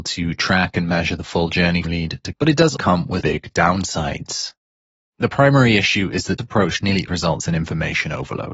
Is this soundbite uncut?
no; 6 cuts; at 1.8 s, 2.3 s, 2.8 s, 3.2 s, 6.4 s, 7.1 s

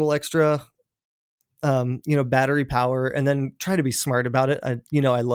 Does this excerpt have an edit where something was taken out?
no; 0 cuts

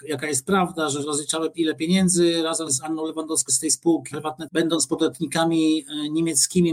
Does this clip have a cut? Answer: yes; 6 cuts; at 1.0 s, 1.5 s, 2.7 s, 3.5 s, 4.1 s, 4.5 s

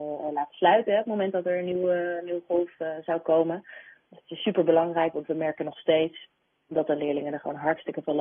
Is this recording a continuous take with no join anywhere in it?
yes; 0 cuts

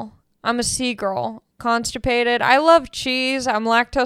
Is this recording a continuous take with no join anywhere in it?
no; 1 cut; at 1.5 s

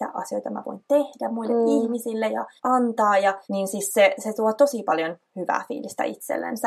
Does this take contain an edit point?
yes; 3 cuts; at 2.6 s, 3.4 s, 4.2 s

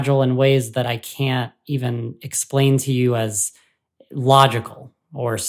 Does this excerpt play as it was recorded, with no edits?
yes; 0 cuts

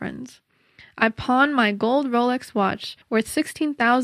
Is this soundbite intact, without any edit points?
no; 1 cut; at 3.0 s

